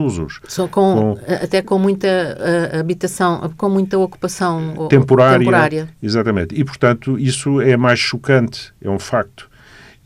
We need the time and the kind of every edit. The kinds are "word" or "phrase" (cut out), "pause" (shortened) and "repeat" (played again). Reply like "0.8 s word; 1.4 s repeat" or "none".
none